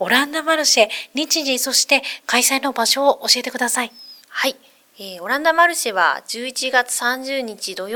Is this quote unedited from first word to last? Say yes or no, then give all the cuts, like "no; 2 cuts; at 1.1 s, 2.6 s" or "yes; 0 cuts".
no; 1 cut; at 4.2 s